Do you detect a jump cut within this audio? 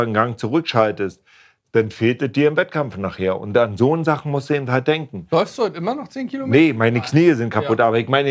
no; 0 cuts

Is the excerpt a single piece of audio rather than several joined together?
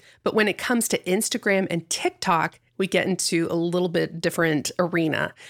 yes; 0 cuts

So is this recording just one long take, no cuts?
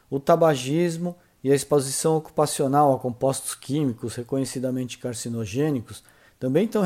yes; 0 cuts

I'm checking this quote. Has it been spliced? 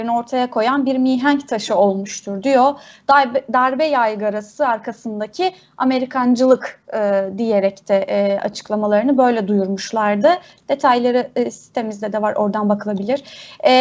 no; 0 cuts

